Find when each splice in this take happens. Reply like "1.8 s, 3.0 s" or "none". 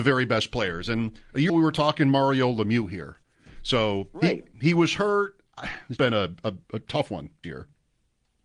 1.5 s, 6.0 s, 6.6 s, 7.4 s